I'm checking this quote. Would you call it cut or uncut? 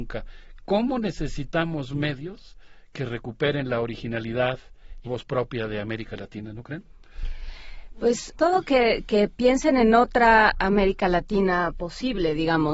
cut